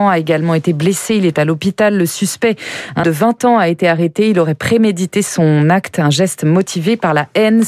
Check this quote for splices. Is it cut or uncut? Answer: cut